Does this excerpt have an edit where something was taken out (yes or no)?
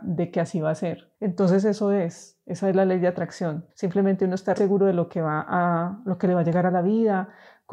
yes